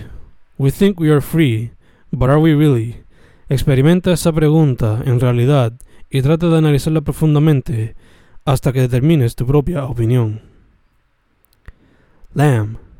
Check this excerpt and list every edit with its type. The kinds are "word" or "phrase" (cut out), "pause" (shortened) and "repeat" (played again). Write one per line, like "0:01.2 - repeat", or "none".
none